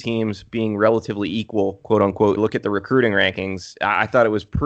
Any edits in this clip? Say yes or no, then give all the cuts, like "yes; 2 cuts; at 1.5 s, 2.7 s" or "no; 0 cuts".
yes; 1 cut; at 2.4 s